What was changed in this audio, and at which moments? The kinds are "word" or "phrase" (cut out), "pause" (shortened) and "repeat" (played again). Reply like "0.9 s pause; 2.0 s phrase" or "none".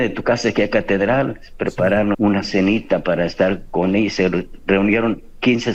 2.1 s word